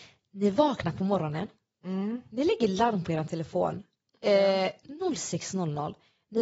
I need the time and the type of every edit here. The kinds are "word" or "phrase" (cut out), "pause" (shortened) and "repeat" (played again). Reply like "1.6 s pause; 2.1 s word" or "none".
none